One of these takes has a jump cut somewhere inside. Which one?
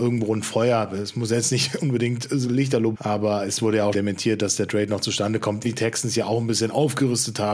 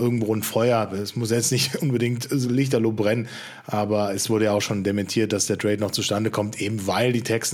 first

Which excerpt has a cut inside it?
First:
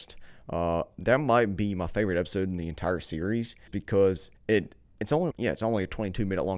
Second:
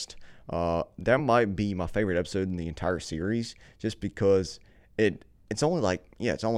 first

